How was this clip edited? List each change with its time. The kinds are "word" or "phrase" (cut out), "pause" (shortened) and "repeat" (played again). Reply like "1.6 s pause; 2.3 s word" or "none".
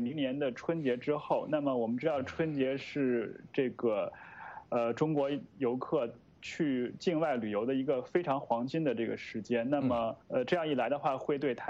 10.2 s pause